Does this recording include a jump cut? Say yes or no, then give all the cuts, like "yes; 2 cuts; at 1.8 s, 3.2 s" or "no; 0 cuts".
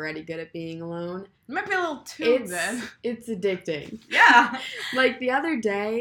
yes; 1 cut; at 1.4 s